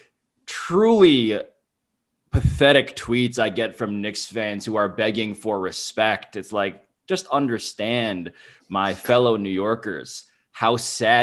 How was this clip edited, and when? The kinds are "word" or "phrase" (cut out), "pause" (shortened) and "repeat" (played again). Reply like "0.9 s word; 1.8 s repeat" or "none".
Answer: 7.0 s pause